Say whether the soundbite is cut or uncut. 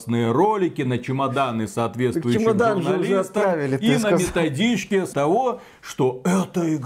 cut